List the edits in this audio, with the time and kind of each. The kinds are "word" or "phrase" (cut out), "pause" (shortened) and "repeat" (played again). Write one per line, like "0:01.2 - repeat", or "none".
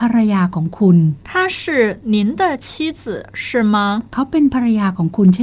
0:01.2 - pause
0:04.1 - pause